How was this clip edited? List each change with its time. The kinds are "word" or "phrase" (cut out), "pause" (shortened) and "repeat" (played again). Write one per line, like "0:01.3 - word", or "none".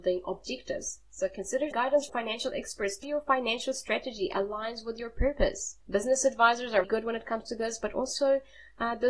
0:01.7 - word
0:02.1 - word
0:03.0 - word
0:05.8 - pause
0:06.8 - word